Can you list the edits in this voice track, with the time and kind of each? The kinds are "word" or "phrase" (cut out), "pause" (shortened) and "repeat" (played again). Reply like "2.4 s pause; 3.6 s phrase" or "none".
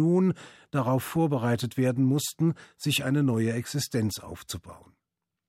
none